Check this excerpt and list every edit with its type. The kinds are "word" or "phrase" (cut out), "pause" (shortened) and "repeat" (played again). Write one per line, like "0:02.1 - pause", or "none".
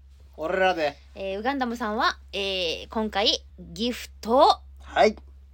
0:03.5 - pause